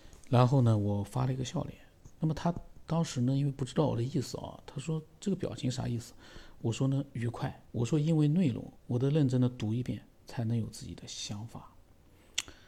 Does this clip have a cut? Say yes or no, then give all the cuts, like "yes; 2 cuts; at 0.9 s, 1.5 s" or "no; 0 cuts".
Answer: yes; 2 cuts; at 7.7 s, 8.8 s